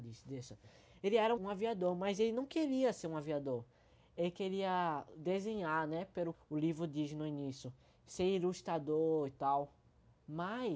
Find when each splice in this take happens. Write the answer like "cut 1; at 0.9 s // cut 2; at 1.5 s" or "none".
cut 1; at 1.4 s // cut 2; at 6.3 s